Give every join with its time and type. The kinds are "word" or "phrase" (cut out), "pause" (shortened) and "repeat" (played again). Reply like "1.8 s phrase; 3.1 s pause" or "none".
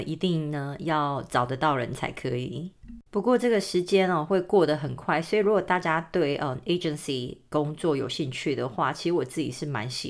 3.1 s pause